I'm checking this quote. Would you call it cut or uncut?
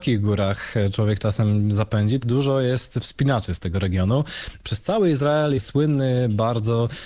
cut